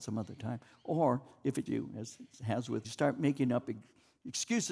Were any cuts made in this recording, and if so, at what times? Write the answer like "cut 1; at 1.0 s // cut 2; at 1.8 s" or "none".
cut 1; at 1.7 s // cut 2; at 2.8 s